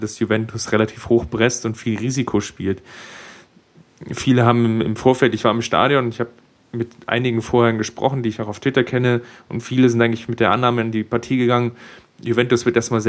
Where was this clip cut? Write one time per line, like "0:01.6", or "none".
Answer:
none